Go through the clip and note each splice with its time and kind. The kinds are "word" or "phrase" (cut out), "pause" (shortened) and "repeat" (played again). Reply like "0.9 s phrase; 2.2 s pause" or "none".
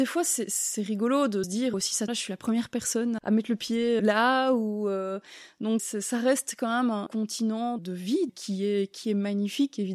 1.4 s word; 1.7 s word; 2.1 s word; 3.2 s word; 4.0 s word; 5.8 s word; 7.1 s word; 7.8 s word; 8.3 s word